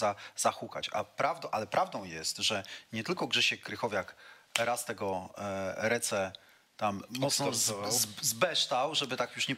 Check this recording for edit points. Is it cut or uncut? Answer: uncut